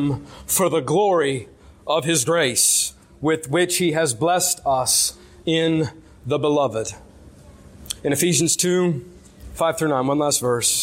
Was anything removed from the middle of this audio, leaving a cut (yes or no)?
no